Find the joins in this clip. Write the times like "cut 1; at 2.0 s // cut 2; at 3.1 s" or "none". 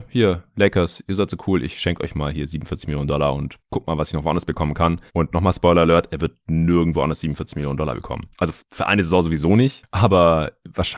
cut 1; at 5.1 s // cut 2; at 8.3 s